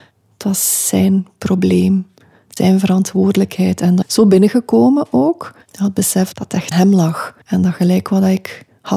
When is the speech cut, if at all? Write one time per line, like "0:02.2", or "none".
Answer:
0:02.6
0:04.0
0:05.6
0:06.7
0:07.4